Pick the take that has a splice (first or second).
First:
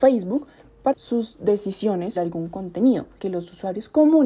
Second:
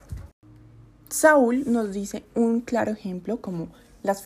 first